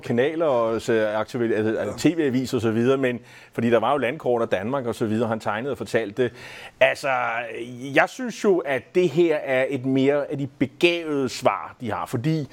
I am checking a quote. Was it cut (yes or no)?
no